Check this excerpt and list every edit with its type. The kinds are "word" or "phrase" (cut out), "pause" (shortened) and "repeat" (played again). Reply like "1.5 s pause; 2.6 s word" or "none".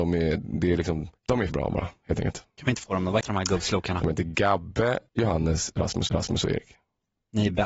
1.2 s pause; 1.5 s word; 2.8 s phrase; 3.2 s word; 5.1 s pause; 6.1 s repeat